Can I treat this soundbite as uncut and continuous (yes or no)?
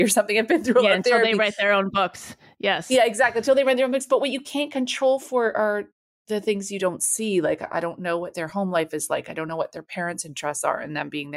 yes